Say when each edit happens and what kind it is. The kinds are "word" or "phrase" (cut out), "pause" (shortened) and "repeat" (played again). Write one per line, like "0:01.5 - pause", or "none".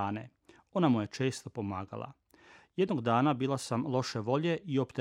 none